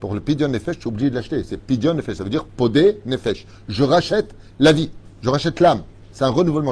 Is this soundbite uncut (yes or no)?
yes